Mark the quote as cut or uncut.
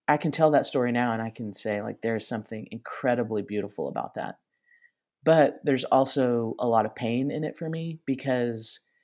uncut